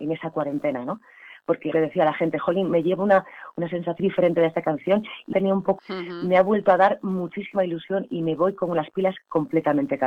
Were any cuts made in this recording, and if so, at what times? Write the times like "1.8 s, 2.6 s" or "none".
1.7 s, 4.0 s, 5.3 s, 5.8 s